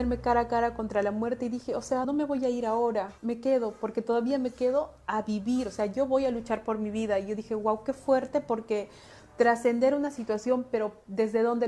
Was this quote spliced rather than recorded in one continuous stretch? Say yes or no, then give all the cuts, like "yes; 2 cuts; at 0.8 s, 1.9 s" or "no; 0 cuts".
yes; 2 cuts; at 2.0 s, 3.2 s